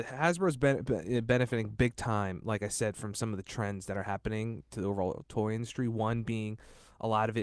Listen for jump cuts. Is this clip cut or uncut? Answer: uncut